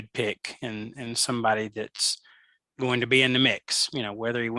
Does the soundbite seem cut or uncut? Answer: uncut